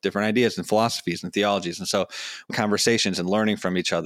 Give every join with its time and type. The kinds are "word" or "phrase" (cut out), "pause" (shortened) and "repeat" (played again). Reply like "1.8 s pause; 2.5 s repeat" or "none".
2.5 s phrase